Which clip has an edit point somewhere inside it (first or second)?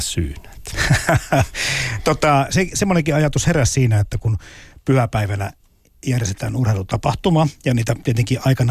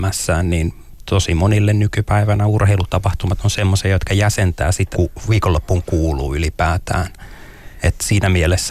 second